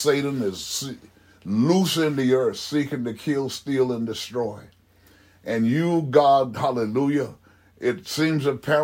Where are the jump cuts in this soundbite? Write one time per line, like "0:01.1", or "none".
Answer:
none